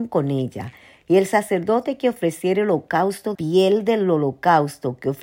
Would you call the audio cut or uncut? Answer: cut